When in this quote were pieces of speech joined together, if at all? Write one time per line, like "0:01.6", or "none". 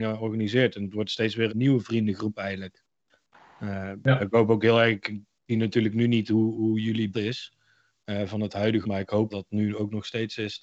0:01.5
0:05.5
0:06.5
0:07.1
0:08.8
0:09.3